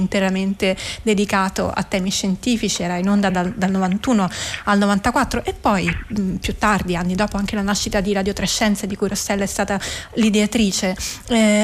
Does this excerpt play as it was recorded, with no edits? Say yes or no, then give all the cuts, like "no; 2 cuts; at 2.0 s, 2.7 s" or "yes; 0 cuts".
yes; 0 cuts